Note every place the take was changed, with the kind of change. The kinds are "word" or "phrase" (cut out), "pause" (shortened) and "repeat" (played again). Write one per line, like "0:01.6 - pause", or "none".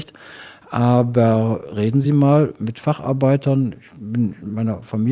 none